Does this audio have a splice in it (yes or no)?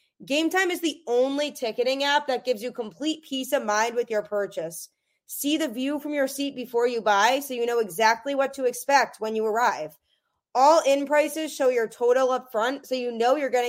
no